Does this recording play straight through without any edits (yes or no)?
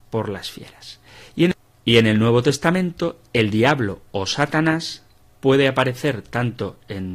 yes